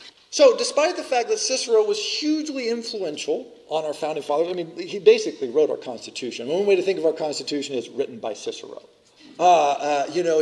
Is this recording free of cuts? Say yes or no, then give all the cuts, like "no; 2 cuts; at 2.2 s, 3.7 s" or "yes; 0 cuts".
yes; 0 cuts